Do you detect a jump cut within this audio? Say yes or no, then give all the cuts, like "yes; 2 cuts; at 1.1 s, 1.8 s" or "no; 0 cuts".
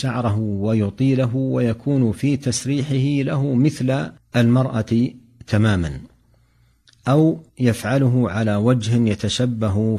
yes; 2 cuts; at 4.2 s, 7.5 s